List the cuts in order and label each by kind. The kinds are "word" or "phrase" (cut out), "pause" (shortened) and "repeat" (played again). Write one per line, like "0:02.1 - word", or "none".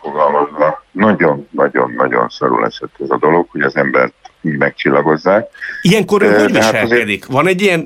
none